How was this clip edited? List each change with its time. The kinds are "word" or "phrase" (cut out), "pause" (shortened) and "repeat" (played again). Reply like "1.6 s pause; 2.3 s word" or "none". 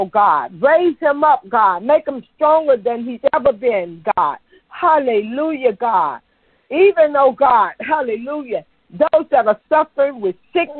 none